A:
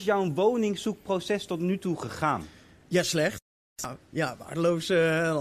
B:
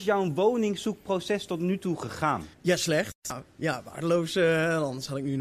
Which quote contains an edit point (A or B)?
B